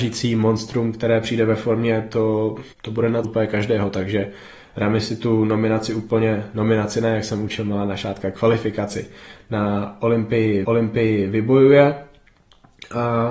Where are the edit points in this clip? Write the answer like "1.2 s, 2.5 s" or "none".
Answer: 2.7 s, 3.2 s, 10.6 s